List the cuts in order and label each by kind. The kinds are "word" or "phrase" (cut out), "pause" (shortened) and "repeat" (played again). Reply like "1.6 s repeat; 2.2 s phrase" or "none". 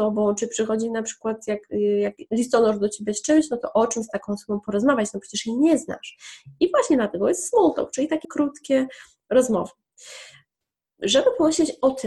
8.2 s word